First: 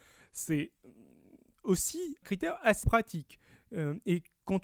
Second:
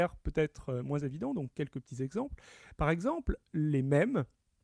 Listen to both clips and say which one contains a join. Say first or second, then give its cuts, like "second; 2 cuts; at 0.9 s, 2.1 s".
first; 2 cuts; at 2.2 s, 2.8 s